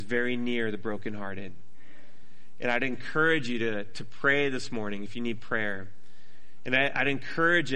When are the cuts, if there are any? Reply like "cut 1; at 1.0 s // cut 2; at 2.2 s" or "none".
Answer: none